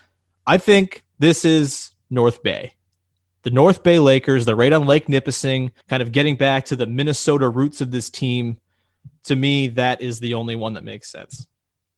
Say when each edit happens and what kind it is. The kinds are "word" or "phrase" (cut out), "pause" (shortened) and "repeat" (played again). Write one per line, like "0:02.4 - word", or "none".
0:05.8 - pause